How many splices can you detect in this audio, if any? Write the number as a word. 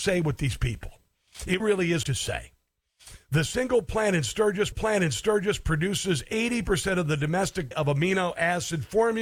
four